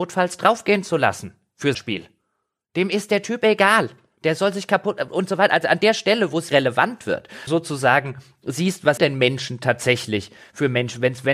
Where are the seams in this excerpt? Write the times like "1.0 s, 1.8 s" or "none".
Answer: 1.7 s, 6.5 s, 7.5 s, 9.0 s